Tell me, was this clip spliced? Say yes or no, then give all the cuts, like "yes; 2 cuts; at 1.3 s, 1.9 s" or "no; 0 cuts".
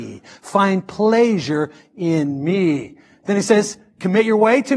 no; 0 cuts